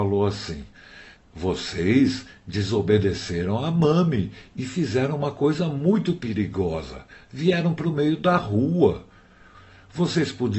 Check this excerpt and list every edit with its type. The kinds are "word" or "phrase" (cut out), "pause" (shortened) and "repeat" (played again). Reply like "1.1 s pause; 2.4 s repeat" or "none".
none

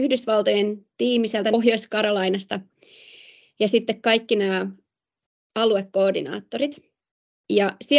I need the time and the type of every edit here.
none

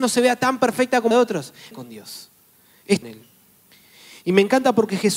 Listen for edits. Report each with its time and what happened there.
1.1 s word; 1.7 s phrase; 3.0 s phrase

